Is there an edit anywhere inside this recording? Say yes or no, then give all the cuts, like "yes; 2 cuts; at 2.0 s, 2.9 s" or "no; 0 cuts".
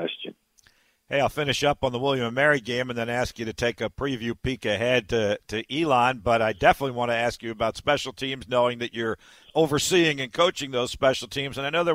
no; 0 cuts